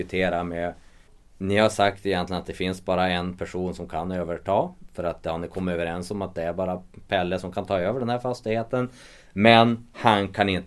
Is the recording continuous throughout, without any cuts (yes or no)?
yes